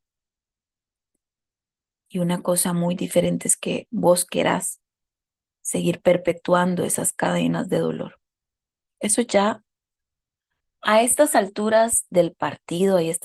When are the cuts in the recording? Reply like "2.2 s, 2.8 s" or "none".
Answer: none

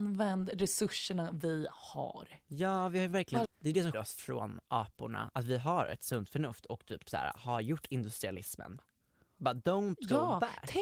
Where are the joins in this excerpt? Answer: 3.4 s, 3.9 s

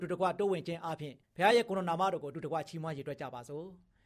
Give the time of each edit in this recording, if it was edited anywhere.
1.2 s

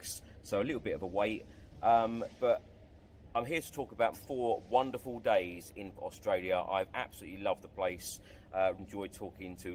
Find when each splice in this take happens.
4.1 s, 6.0 s, 8.8 s

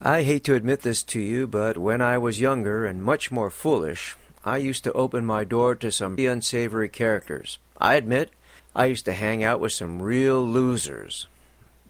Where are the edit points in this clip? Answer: 6.2 s, 7.6 s, 8.6 s

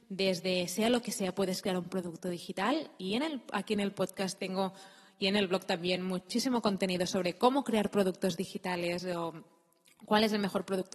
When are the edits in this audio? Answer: none

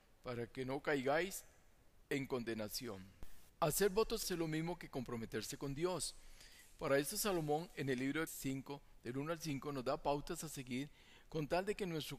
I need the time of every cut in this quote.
2.0 s, 4.2 s, 8.3 s

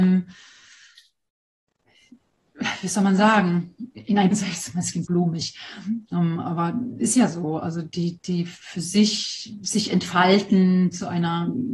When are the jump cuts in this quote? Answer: 4.3 s, 5.0 s

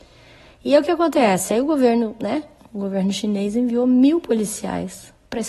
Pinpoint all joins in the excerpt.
none

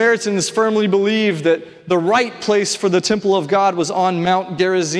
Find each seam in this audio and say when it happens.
none

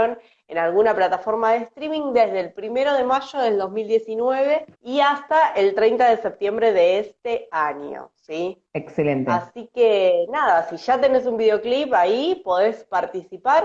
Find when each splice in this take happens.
4.7 s, 8.7 s

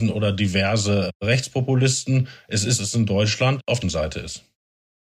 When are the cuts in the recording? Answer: 2.8 s, 3.8 s

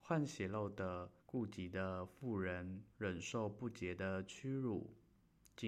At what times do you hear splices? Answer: 1.2 s, 2.9 s

